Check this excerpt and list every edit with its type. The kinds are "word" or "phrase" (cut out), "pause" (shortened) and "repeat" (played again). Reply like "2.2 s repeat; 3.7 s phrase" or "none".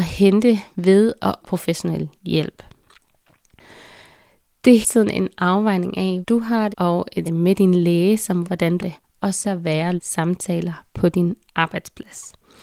1.4 s word; 4.8 s word; 6.2 s word; 6.7 s word; 7.2 s word; 8.4 s word; 8.8 s word; 9.4 s word; 10.0 s word